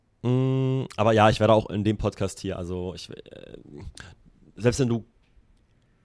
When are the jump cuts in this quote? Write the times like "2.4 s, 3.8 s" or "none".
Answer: none